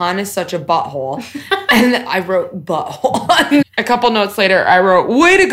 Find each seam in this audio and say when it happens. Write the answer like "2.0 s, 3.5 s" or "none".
3.6 s